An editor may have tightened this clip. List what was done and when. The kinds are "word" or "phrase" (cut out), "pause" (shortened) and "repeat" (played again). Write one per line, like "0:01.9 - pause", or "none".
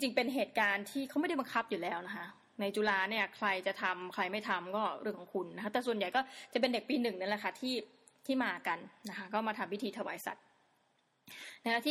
none

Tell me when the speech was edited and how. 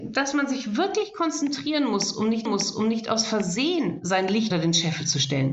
0:02.5 - repeat
0:04.5 - word

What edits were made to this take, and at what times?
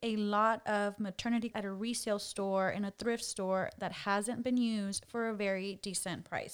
0:01.5 - word

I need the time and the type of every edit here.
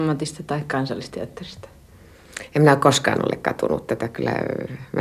none

